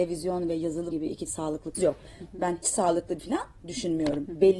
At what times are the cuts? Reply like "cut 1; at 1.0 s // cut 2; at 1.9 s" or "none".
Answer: cut 1; at 0.9 s // cut 2; at 1.3 s // cut 3; at 1.7 s // cut 4; at 2.6 s // cut 5; at 3.2 s

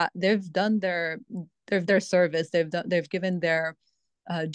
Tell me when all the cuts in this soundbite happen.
cut 1; at 1.9 s

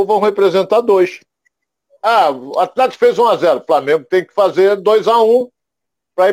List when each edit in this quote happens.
none

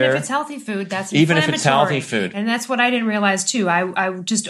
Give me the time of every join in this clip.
none

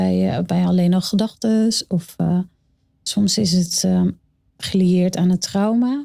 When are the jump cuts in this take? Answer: none

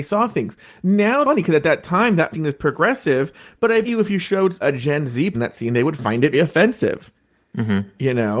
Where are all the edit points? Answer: cut 1; at 1.2 s // cut 2; at 2.3 s // cut 3; at 3.8 s // cut 4; at 4.6 s // cut 5; at 5.3 s // cut 6; at 6.3 s

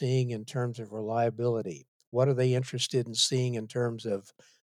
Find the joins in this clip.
none

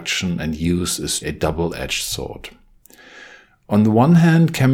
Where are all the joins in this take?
cut 1; at 1.2 s

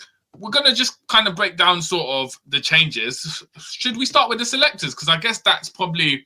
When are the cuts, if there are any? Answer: none

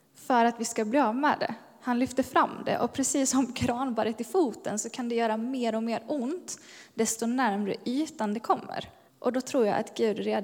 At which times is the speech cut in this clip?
cut 1; at 9.1 s

